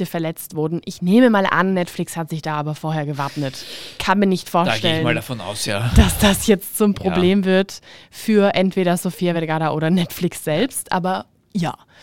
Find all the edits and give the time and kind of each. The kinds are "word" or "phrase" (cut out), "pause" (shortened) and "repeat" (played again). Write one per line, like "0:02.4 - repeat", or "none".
none